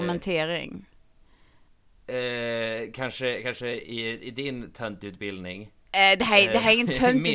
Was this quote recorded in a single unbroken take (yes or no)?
yes